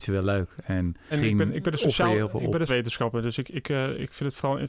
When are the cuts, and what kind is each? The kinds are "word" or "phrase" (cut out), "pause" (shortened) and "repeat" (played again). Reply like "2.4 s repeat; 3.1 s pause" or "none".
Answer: 1.1 s word; 2.7 s word